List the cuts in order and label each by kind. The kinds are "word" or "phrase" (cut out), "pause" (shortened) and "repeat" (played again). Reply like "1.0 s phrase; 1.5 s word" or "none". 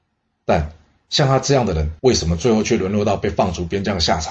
2.0 s pause